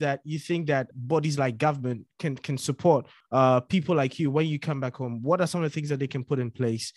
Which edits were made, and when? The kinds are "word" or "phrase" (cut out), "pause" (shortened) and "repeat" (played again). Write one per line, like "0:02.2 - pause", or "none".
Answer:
0:00.9 - word